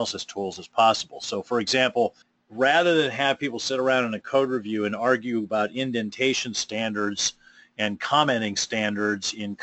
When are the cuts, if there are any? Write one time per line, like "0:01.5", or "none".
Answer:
0:02.2